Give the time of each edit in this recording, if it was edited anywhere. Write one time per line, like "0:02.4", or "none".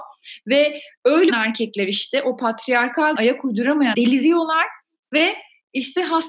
0:01.3
0:03.2
0:03.9